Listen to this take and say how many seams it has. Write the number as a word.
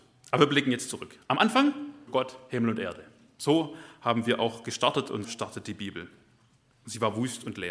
two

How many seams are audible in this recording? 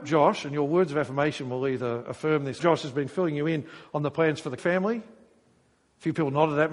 two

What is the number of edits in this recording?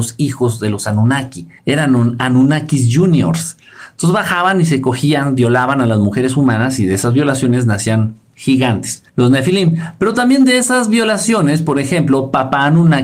two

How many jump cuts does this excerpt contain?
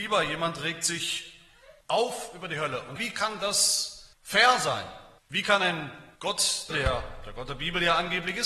six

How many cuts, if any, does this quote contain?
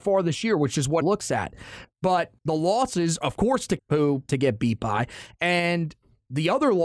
five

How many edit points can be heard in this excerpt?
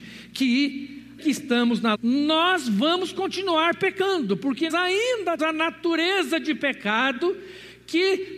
four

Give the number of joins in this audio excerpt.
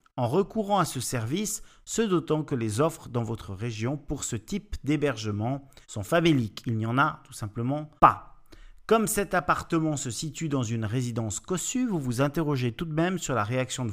two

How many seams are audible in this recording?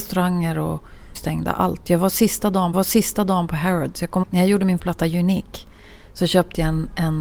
four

